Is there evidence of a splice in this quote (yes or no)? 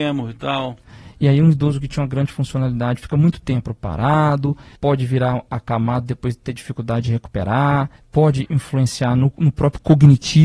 no